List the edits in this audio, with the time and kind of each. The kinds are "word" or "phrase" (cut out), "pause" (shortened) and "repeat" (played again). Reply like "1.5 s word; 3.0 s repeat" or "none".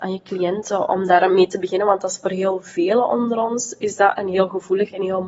none